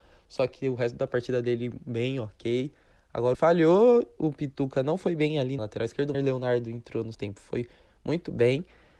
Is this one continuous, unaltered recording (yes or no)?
no